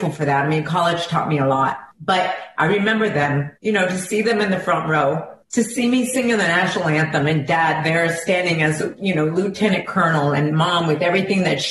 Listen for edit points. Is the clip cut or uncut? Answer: cut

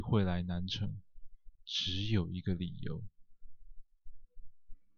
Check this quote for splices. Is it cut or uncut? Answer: cut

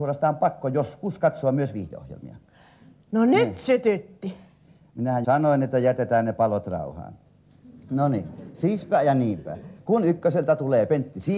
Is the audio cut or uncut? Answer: cut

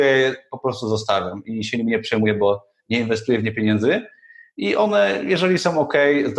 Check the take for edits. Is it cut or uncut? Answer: uncut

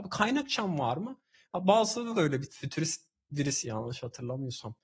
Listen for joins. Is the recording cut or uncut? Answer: cut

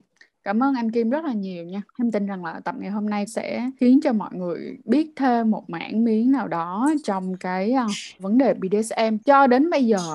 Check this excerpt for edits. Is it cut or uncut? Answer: cut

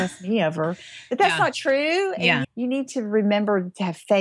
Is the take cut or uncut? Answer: cut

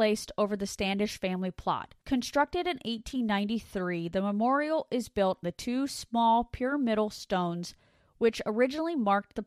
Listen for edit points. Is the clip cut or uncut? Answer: cut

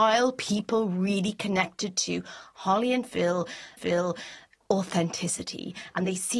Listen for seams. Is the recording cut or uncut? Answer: cut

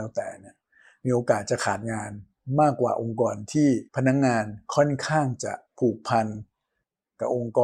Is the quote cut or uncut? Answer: cut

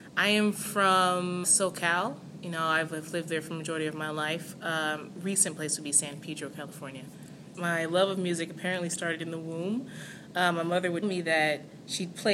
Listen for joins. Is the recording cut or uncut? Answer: cut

